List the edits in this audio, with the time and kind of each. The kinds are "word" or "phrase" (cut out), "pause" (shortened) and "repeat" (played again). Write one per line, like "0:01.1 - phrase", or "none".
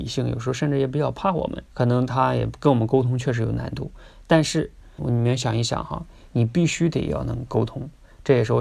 0:01.6 - pause
0:05.0 - word